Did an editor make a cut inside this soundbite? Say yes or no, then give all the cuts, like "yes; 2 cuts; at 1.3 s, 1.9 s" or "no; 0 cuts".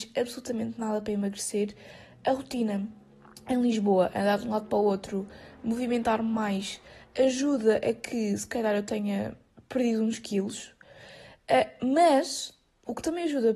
no; 0 cuts